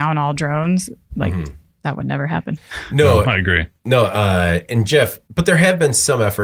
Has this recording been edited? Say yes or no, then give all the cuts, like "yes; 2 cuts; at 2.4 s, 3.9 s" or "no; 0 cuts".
yes; 1 cut; at 5.3 s